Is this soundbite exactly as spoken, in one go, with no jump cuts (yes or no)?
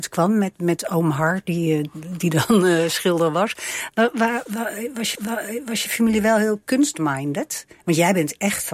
no